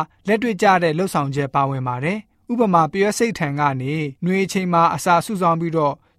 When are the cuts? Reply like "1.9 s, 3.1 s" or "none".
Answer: 4.2 s